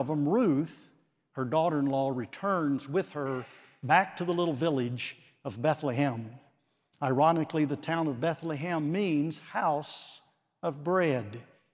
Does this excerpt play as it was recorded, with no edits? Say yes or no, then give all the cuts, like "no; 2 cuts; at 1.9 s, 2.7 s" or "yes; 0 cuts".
yes; 0 cuts